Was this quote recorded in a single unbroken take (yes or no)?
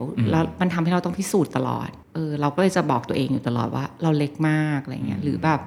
no